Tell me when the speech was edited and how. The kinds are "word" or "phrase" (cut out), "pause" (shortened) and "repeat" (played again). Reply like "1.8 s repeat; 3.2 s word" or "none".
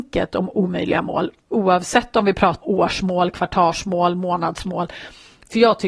1.4 s word; 2.6 s word